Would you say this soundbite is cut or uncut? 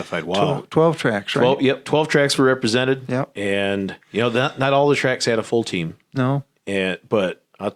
cut